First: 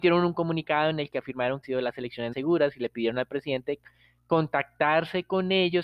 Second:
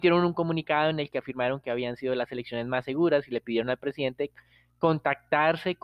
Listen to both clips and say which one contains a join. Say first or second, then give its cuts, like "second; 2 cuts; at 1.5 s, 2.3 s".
first; 2 cuts; at 1.6 s, 2.3 s